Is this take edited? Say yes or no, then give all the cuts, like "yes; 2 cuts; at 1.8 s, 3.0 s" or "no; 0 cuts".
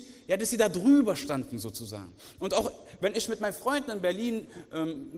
no; 0 cuts